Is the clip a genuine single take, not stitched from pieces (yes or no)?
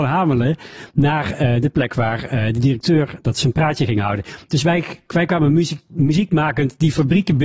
yes